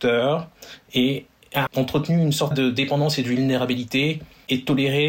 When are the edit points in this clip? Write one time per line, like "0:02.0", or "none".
0:01.7
0:02.5